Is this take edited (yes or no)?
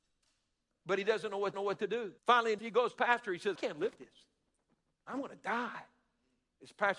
yes